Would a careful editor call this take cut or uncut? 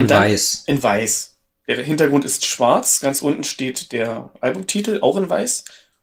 uncut